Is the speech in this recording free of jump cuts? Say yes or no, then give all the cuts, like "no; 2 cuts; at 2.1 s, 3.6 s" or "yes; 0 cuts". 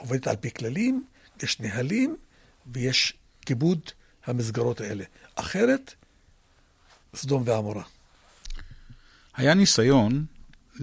yes; 0 cuts